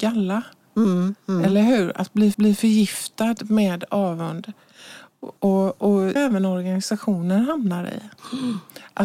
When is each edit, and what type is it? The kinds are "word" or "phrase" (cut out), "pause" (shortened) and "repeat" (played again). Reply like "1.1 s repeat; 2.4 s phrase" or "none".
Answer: 2.3 s repeat; 5.4 s pause; 6.2 s phrase

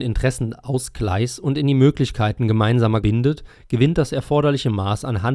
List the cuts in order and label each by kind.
3.0 s word

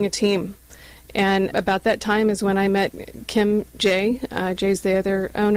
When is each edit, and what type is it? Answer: 1.5 s word; 3.8 s word

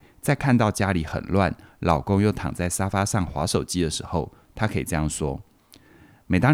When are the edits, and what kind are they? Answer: none

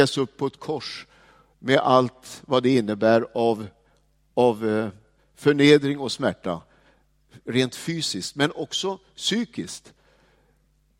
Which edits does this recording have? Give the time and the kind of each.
none

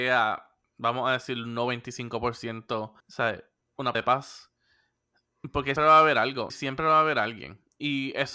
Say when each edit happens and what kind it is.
3.0 s pause; 3.9 s word; 5.8 s word; 6.5 s word

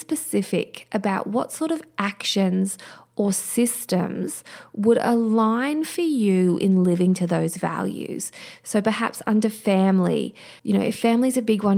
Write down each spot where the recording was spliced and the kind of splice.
10.6 s pause

